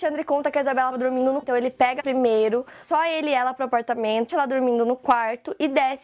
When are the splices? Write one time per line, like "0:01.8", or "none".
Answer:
0:00.9
0:01.4
0:02.0
0:02.8
0:04.3